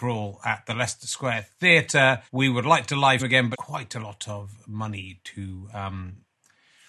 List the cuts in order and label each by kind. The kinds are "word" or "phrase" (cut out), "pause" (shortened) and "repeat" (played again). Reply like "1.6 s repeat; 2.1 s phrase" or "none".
2.3 s pause; 3.2 s word; 3.5 s phrase